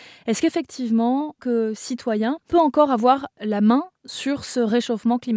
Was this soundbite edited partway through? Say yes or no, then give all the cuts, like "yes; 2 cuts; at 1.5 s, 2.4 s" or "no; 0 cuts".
yes; 2 cuts; at 1.4 s, 2.5 s